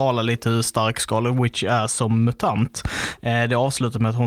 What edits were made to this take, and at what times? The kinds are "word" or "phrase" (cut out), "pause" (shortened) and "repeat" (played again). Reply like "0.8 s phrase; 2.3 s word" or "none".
none